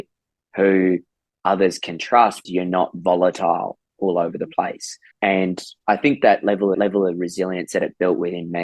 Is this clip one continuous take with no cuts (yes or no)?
no